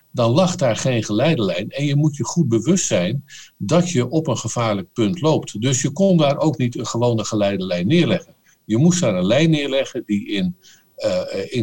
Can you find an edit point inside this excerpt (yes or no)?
no